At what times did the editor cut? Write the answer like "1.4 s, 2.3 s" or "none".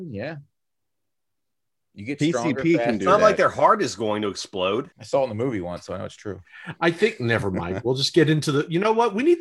4.9 s